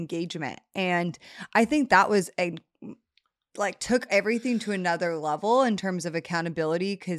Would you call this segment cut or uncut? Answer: uncut